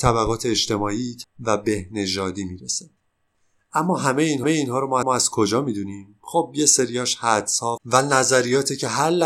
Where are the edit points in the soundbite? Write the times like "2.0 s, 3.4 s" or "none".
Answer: 1.2 s, 4.4 s, 5.0 s, 7.8 s